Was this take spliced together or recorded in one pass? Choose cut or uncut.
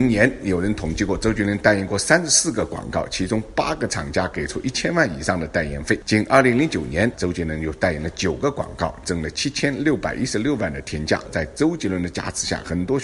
uncut